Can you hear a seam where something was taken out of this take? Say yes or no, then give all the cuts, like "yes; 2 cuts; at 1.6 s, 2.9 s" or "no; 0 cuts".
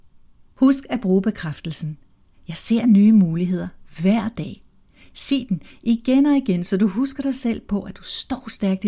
no; 0 cuts